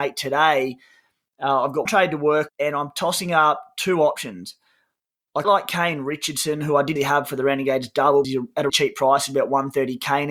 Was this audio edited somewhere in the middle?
yes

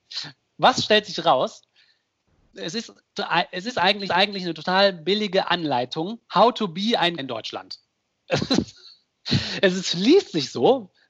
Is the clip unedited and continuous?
no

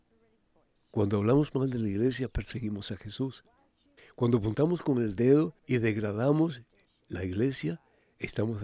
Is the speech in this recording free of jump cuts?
no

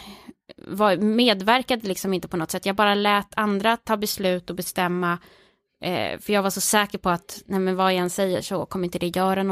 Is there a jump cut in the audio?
no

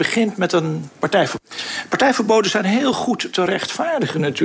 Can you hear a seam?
no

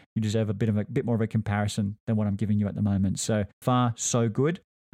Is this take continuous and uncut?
no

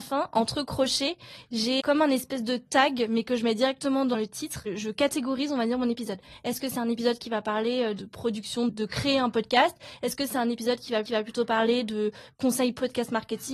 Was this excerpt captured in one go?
no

